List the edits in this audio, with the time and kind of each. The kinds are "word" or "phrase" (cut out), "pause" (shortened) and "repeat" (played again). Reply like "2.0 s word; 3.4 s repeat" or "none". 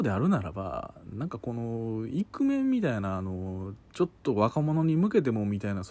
3.8 s pause